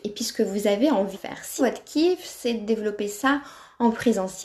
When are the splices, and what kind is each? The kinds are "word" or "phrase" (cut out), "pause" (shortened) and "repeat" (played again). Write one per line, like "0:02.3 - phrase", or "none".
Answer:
0:01.1 - word
0:01.6 - word